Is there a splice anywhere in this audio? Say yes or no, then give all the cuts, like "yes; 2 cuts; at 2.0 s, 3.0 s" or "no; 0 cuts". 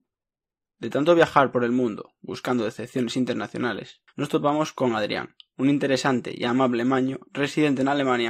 yes; 1 cut; at 4.1 s